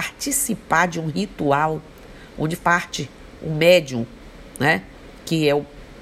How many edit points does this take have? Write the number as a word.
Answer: one